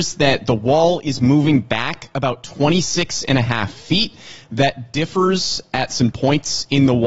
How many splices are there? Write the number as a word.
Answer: one